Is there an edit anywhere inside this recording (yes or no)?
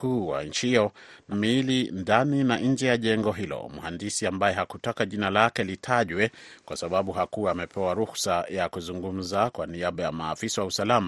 yes